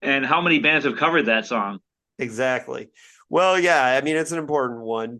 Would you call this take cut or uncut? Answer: uncut